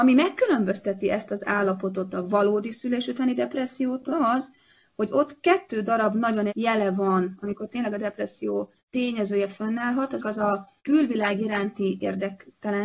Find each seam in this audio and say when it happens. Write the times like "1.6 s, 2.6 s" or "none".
4.1 s, 6.5 s, 8.8 s, 10.2 s, 10.8 s